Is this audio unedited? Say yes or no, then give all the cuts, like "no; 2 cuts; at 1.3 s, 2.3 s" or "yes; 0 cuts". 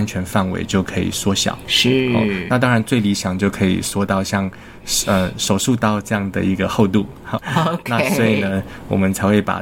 no; 1 cut; at 7.4 s